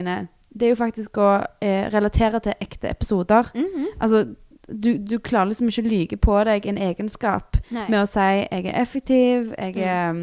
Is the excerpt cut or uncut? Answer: uncut